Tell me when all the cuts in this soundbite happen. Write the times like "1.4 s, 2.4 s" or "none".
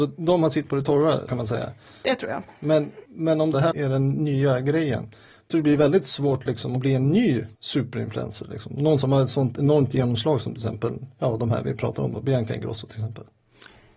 1.3 s, 3.1 s, 3.7 s, 5.5 s, 7.6 s